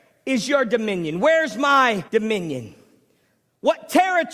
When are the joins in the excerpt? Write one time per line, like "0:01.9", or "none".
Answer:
0:02.1